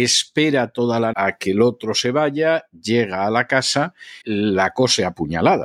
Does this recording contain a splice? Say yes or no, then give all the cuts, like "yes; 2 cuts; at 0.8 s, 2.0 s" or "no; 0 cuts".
yes; 2 cuts; at 1.1 s, 4.2 s